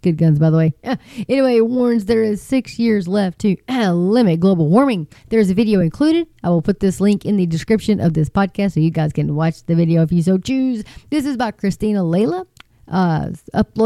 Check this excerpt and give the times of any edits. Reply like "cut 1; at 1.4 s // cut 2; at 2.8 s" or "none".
none